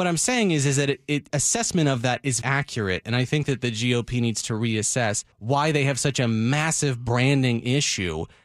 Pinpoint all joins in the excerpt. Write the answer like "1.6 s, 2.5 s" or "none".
1.3 s, 2.4 s, 5.3 s